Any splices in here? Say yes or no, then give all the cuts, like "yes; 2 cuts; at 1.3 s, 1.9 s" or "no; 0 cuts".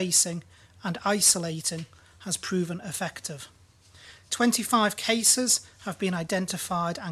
no; 0 cuts